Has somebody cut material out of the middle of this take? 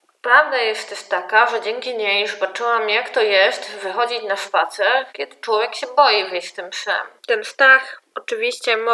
yes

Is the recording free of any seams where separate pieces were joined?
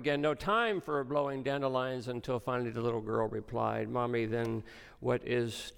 yes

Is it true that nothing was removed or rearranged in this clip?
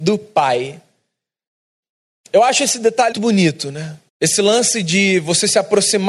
no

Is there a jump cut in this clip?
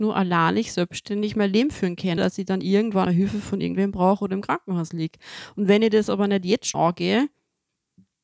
yes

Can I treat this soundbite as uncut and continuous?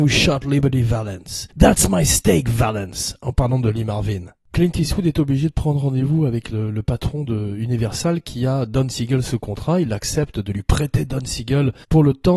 yes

